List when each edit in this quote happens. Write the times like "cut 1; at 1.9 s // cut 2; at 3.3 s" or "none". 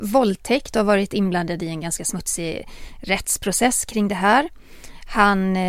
none